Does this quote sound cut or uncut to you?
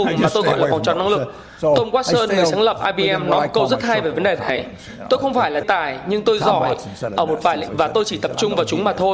cut